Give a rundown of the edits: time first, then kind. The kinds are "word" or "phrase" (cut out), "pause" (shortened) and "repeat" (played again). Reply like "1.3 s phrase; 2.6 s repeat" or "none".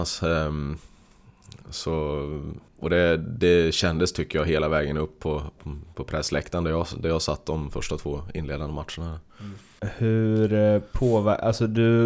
2.7 s pause